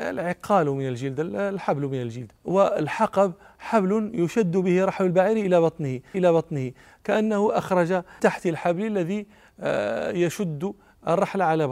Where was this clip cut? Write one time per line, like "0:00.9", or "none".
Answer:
0:02.4
0:06.1
0:08.2